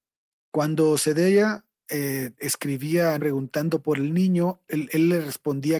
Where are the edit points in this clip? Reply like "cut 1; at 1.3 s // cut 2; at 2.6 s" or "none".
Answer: cut 1; at 3.2 s // cut 2; at 4.7 s